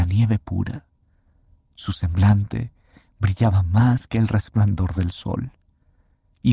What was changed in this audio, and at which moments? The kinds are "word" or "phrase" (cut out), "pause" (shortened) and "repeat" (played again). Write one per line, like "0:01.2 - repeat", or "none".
none